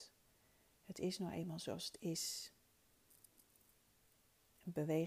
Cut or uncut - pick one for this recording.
uncut